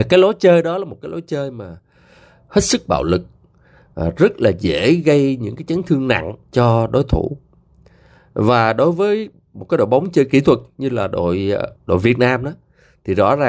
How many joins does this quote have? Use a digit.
2